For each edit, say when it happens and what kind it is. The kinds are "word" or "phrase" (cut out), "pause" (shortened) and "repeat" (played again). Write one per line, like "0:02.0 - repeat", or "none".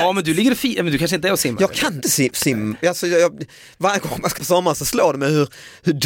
0:02.0 - word
0:04.3 - word